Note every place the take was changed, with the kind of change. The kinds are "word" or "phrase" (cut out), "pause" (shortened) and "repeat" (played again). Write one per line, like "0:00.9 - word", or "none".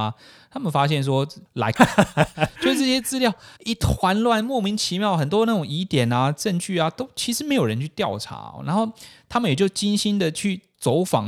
0:01.8 - word
0:03.6 - pause